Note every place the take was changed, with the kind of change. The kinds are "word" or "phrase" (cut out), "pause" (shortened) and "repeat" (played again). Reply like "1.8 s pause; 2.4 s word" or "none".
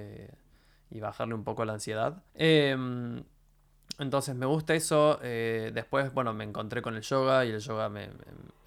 2.3 s pause